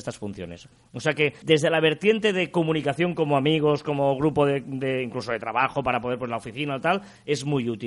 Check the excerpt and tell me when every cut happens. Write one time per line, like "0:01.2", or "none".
0:01.4